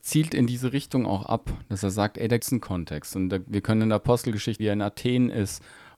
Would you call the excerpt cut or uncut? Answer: cut